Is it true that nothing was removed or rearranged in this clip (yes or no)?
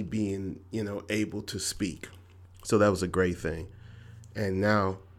yes